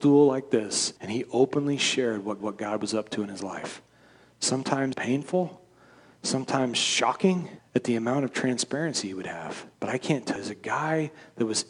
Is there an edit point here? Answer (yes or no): yes